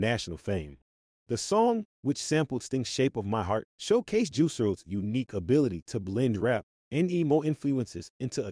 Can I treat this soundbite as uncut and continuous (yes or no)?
no